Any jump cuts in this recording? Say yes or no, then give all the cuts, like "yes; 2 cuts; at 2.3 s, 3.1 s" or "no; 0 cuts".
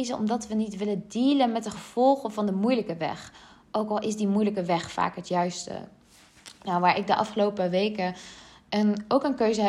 no; 0 cuts